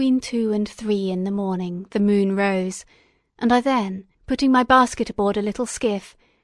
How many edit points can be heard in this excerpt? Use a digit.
1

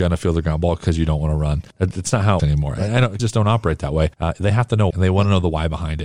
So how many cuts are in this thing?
5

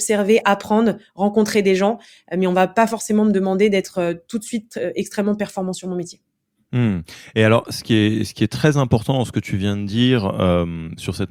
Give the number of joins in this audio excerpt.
0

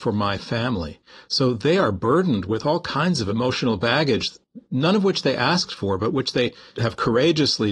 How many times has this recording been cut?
0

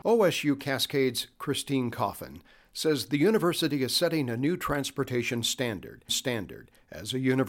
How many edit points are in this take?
1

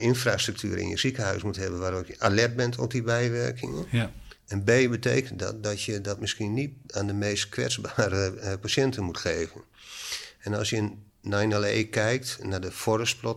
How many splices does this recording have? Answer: 1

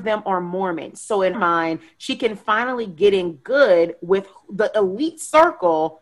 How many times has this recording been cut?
1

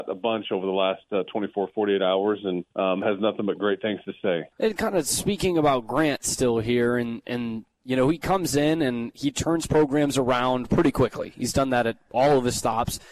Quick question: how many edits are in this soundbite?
2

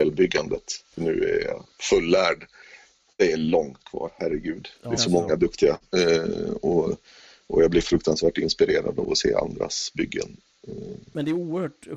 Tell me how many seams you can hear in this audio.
2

